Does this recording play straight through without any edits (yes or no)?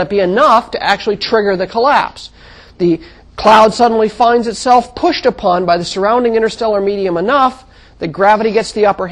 yes